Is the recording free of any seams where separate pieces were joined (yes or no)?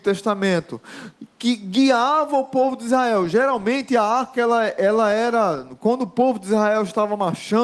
yes